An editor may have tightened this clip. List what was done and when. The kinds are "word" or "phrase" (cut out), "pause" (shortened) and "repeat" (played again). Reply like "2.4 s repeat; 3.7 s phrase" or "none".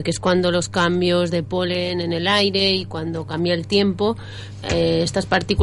4.6 s word